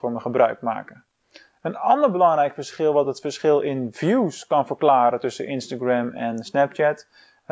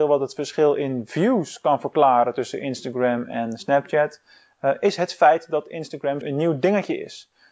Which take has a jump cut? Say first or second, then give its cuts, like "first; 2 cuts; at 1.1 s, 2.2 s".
second; 1 cut; at 6.2 s